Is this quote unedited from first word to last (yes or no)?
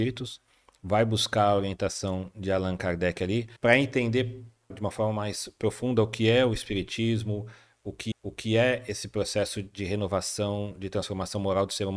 no